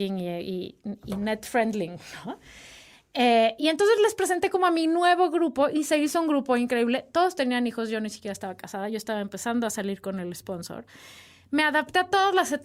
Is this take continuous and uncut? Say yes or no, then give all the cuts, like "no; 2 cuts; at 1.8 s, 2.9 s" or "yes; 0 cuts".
yes; 0 cuts